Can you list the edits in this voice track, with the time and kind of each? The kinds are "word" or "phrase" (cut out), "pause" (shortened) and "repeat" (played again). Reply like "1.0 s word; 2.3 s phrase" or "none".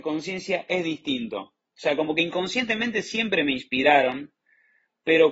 none